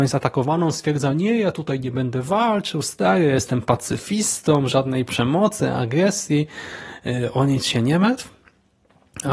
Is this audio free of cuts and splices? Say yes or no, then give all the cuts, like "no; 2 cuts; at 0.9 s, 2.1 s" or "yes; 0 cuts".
yes; 0 cuts